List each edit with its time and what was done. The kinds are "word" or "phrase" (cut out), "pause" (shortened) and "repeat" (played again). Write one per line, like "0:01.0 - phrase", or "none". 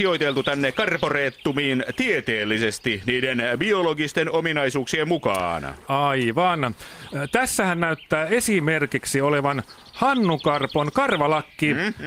none